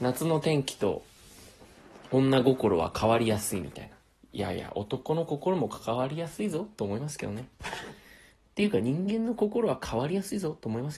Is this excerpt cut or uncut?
uncut